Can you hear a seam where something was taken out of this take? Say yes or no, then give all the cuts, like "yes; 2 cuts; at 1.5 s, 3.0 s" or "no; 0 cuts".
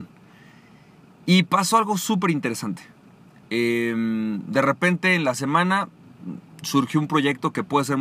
no; 0 cuts